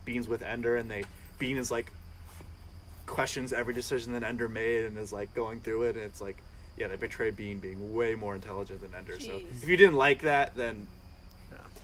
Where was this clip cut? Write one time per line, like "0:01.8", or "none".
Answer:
none